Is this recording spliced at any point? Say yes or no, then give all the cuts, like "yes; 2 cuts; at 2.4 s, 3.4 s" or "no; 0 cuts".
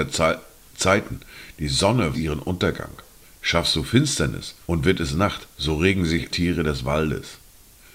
yes; 5 cuts; at 2.1 s, 3.2 s, 4.6 s, 5.5 s, 6.3 s